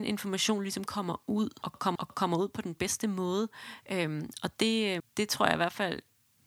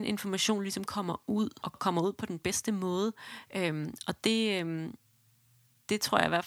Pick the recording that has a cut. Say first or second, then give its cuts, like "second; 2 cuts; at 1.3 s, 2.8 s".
first; 2 cuts; at 2.0 s, 5.0 s